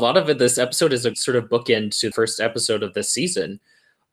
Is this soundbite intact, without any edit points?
no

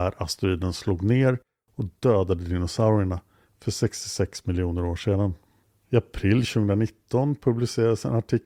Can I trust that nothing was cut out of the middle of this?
yes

